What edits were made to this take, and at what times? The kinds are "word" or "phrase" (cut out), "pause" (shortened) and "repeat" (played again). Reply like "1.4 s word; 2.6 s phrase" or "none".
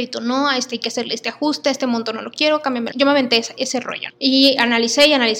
2.9 s word; 4.1 s word